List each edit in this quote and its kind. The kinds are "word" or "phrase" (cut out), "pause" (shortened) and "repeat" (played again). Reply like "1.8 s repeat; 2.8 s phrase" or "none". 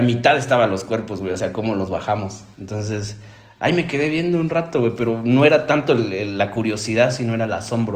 2.5 s pause

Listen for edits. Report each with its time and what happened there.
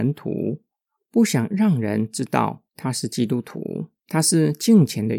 2.7 s pause; 4.0 s pause

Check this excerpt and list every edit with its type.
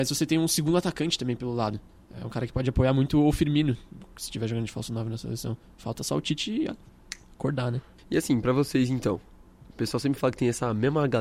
none

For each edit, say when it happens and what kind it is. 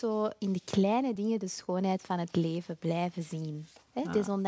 none

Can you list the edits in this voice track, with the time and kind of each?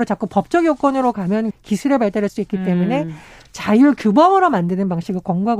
1.5 s word; 2.3 s word

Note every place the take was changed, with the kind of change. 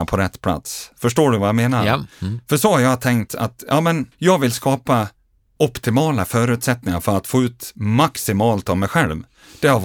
2.1 s pause; 3.3 s word; 4.1 s pause; 5.6 s word

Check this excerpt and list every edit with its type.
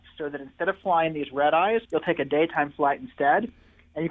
1.8 s pause

